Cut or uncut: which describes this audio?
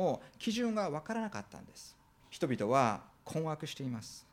cut